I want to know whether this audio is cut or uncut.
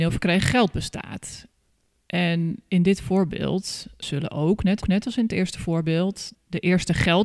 cut